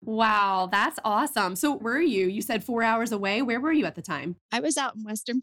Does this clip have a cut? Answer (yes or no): yes